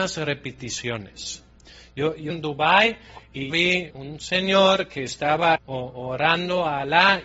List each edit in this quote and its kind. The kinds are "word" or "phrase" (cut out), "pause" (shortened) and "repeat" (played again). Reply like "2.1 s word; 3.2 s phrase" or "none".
2.3 s word; 3.5 s word; 3.9 s word; 5.6 s word